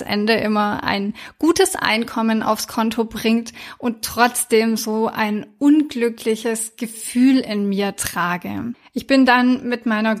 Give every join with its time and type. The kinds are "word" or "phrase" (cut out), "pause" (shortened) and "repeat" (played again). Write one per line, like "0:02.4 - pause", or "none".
none

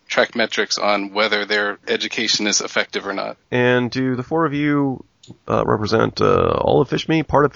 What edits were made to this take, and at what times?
0:01.8 - pause
0:03.4 - pause

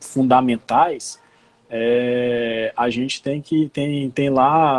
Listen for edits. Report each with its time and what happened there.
none

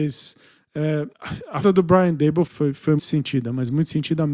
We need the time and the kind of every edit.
0:01.1 - pause
0:01.6 - word
0:02.5 - word
0:03.0 - word

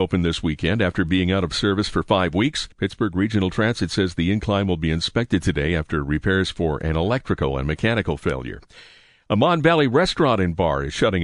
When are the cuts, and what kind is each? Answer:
0:02.7 - pause

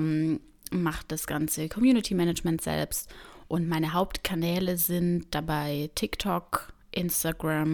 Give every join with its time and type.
none

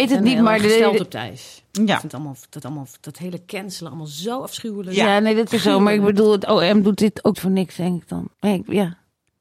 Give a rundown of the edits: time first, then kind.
0:02.6 - repeat
0:05.5 - word
0:07.3 - word
0:08.3 - pause

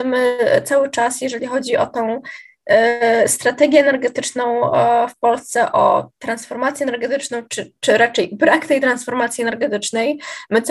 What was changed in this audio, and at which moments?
none

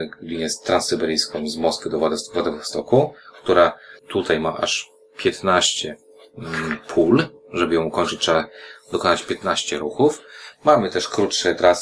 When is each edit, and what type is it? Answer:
0:04.0 - pause

